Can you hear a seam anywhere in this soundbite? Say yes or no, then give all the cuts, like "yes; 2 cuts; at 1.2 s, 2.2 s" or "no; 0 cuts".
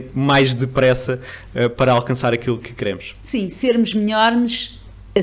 yes; 1 cut; at 2.6 s